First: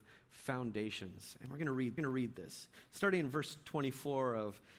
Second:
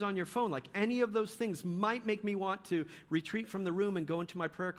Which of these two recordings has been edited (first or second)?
first